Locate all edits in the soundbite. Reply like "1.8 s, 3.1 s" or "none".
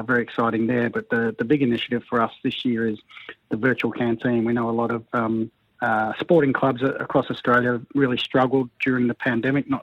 5.6 s